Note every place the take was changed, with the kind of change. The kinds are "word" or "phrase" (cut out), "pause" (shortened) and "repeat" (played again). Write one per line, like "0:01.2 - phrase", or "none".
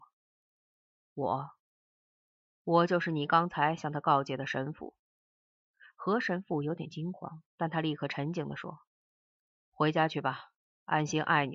0:07.5 - pause